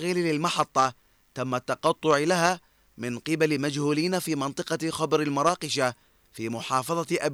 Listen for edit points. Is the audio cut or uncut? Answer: uncut